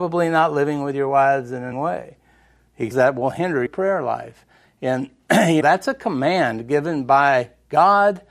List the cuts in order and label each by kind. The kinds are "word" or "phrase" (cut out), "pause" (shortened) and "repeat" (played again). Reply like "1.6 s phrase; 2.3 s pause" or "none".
1.7 s word; 2.9 s word; 3.7 s word; 5.6 s word